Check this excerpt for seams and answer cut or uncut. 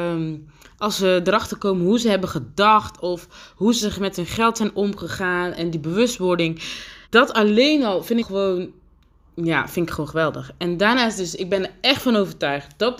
cut